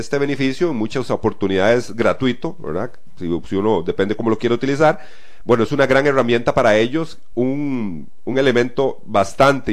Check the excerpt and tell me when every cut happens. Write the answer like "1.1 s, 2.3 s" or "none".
none